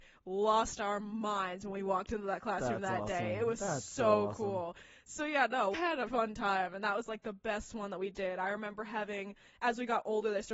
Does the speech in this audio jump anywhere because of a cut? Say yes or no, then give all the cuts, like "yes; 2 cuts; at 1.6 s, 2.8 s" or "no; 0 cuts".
yes; 2 cuts; at 5.7 s, 6.1 s